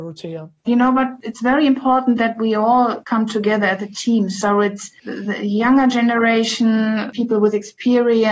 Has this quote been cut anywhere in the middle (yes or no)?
no